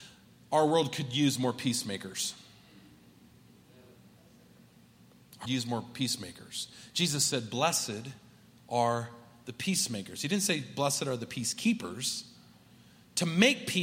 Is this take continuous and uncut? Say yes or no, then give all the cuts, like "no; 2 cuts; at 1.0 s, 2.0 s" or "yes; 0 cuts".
no; 1 cut; at 5.4 s